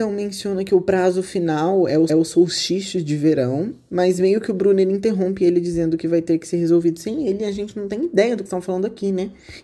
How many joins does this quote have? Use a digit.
2